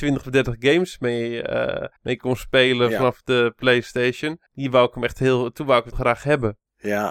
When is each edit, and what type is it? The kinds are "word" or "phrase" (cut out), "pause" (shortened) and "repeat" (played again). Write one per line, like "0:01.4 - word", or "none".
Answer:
0:02.0 - pause
0:04.5 - pause
0:05.9 - phrase